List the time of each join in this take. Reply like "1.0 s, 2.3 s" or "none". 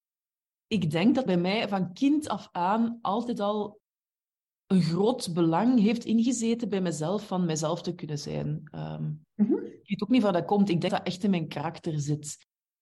1.3 s, 10.9 s